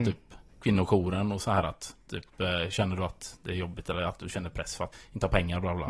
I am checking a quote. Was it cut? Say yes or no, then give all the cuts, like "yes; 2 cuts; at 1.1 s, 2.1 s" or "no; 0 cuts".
yes; 1 cut; at 4.9 s